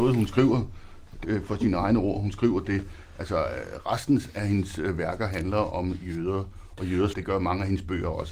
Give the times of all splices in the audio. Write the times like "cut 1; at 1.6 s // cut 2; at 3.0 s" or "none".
cut 1; at 1.2 s // cut 2; at 7.1 s